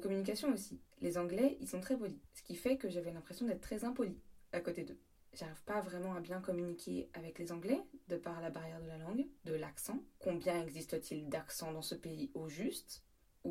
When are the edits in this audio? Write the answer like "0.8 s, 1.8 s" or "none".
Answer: 9.4 s